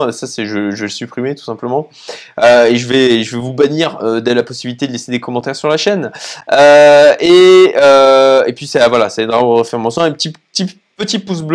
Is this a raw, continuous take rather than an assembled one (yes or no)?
yes